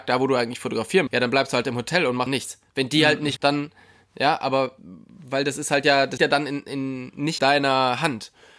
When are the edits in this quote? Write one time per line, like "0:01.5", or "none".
0:01.1
0:02.3
0:03.4
0:06.2
0:07.4